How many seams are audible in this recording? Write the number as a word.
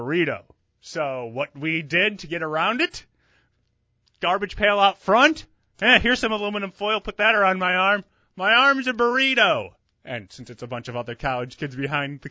zero